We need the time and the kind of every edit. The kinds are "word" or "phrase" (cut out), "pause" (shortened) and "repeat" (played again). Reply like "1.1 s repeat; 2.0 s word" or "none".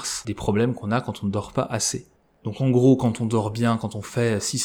none